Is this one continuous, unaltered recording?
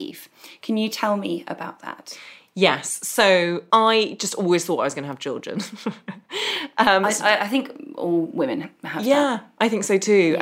yes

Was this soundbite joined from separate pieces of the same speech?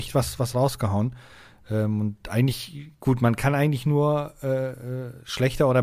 no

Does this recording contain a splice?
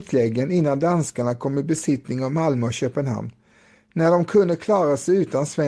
no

